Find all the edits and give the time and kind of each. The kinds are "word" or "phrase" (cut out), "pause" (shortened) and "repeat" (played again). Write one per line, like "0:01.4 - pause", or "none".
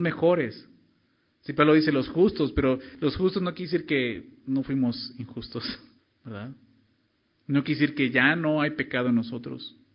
0:06.0 - pause

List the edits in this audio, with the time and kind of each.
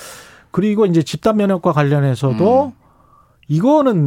none

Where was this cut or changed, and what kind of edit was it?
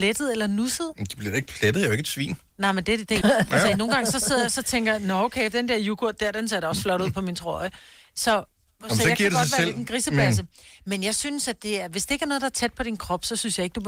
0:03.2 - word

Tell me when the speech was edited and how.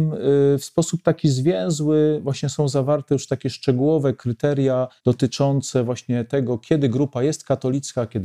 0:05.0 - pause

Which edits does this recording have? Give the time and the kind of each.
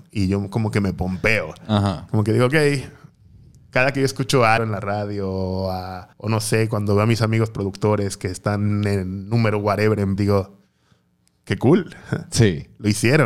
0:04.6 - word
0:06.1 - pause
0:10.2 - word

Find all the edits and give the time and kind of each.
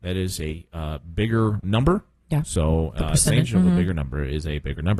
0:01.6 - word
0:03.5 - word

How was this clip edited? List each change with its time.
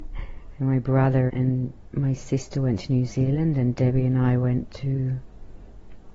0:01.3 - word

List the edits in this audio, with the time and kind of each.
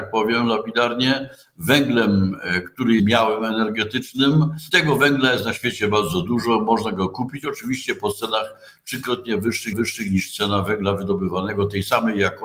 0:03.0 - word
0:04.7 - word
0:09.7 - repeat

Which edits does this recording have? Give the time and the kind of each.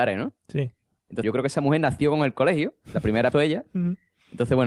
0:01.2 - word
0:03.3 - phrase

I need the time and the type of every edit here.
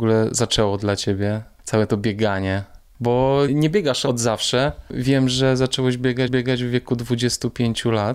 0:03.5 - word
0:06.3 - repeat

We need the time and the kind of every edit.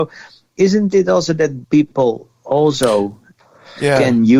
0:01.6 - word

